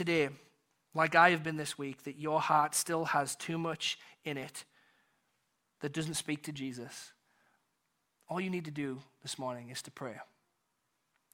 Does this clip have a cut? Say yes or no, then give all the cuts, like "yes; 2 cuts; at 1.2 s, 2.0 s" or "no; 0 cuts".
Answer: no; 0 cuts